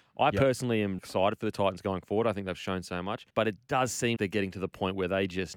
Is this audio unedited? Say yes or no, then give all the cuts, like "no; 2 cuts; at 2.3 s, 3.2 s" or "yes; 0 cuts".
no; 3 cuts; at 1.0 s, 3.3 s, 4.2 s